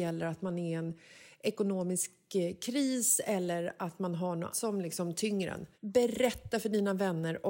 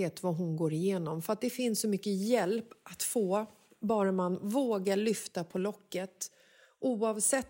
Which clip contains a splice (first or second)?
first